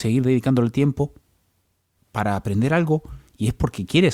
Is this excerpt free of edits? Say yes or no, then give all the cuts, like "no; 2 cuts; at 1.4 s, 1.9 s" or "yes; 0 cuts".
yes; 0 cuts